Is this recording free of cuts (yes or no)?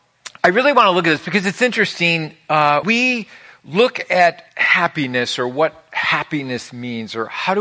no